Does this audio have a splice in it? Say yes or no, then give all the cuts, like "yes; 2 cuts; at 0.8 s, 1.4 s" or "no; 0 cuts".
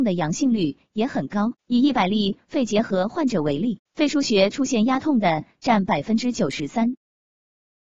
yes; 2 cuts; at 1.6 s, 3.9 s